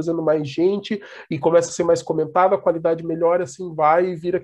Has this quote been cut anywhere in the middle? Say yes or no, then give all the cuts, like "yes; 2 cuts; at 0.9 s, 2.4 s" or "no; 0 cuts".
no; 0 cuts